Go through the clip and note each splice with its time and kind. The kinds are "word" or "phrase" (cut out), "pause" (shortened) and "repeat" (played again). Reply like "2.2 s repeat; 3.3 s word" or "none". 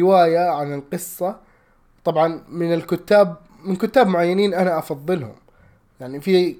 none